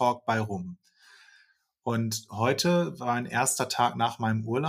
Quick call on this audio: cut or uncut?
uncut